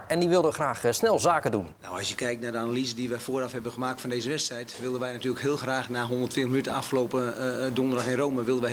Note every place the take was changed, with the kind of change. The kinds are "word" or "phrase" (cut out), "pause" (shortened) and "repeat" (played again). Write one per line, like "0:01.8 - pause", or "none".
0:01.8 - pause